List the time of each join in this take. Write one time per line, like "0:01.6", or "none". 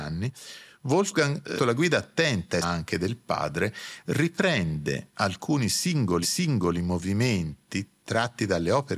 0:01.6
0:02.6
0:06.2